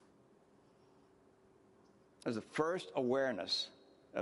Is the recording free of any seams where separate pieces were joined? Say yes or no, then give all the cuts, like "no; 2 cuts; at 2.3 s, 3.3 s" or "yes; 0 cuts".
yes; 0 cuts